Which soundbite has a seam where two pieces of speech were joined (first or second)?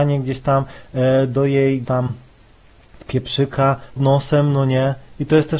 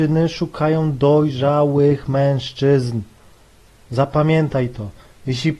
first